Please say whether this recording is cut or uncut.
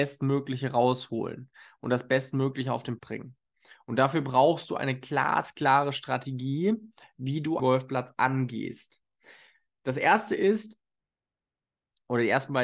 cut